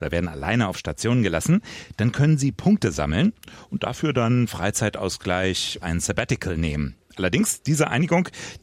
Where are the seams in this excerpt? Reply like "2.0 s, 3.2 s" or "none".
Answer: 5.8 s